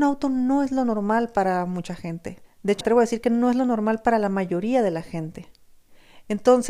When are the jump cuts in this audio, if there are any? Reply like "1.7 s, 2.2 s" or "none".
2.4 s, 2.8 s